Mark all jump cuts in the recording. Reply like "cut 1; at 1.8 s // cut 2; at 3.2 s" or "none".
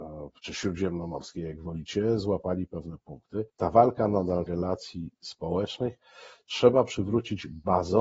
cut 1; at 3.5 s // cut 2; at 4.5 s